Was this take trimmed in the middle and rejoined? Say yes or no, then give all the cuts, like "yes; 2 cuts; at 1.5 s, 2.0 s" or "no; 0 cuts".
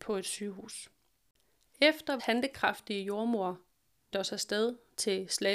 yes; 2 cuts; at 2.2 s, 4.1 s